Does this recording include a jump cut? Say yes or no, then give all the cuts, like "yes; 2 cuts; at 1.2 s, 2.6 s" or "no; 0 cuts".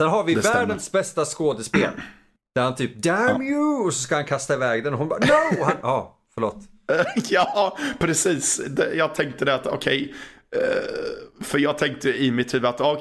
no; 0 cuts